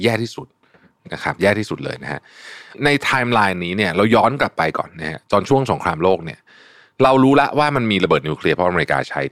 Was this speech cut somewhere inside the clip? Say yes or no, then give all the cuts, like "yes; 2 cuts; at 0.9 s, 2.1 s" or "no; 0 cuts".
no; 0 cuts